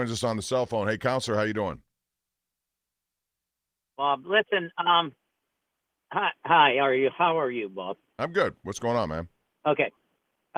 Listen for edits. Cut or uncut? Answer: uncut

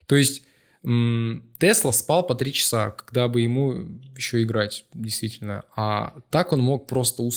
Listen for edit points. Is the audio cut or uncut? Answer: uncut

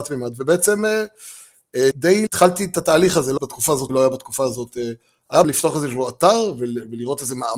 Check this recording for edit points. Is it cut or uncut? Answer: cut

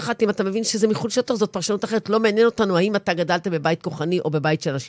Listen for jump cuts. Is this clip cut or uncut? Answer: uncut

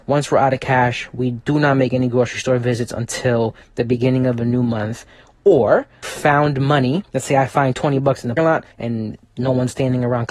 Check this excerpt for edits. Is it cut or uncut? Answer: cut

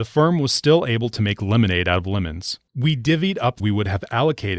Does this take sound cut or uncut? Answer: cut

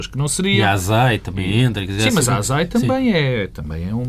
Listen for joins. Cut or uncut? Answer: uncut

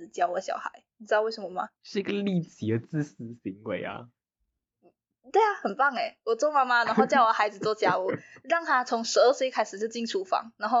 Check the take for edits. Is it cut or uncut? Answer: cut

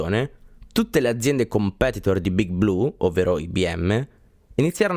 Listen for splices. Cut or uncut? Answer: uncut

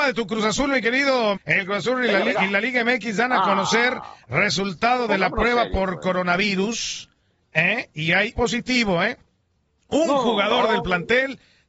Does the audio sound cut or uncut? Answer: cut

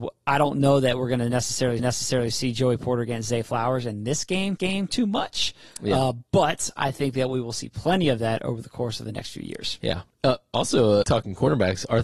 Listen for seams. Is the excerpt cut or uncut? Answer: cut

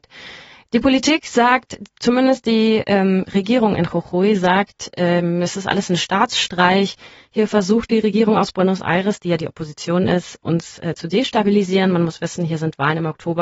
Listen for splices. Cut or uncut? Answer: uncut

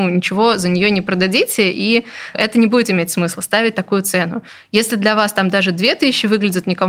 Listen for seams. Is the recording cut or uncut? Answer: cut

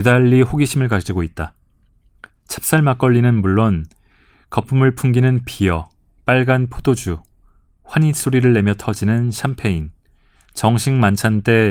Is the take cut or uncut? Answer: uncut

